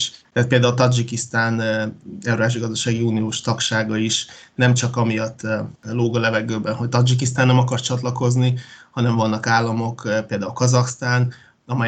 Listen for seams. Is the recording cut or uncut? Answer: cut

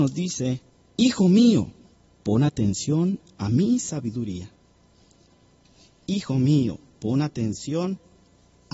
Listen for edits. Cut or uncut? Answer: uncut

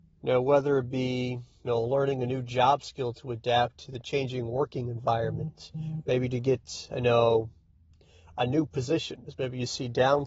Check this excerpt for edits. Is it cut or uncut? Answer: uncut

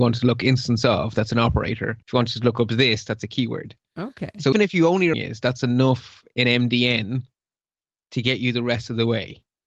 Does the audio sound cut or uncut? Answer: cut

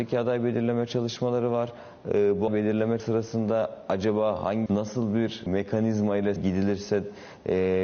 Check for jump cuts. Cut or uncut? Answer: cut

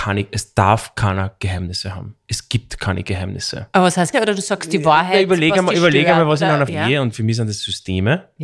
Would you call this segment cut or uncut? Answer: cut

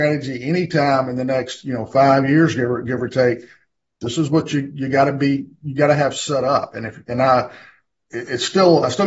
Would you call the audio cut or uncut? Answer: uncut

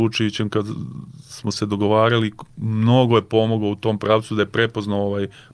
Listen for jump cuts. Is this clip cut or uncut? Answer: uncut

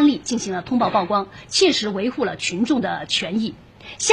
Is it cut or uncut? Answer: uncut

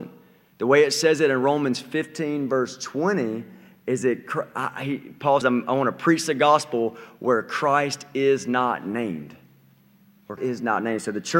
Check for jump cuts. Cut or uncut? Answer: cut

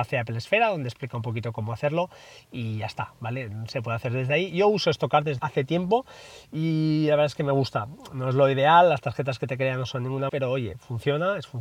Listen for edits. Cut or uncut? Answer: cut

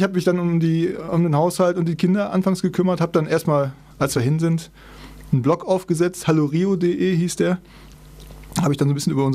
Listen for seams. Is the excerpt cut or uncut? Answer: uncut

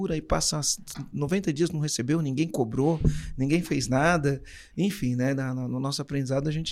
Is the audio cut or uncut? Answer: uncut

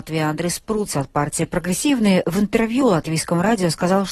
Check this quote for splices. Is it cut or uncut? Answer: uncut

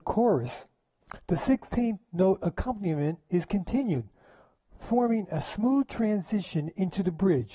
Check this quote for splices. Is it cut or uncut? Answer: uncut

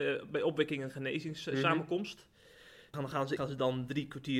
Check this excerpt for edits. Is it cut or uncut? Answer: cut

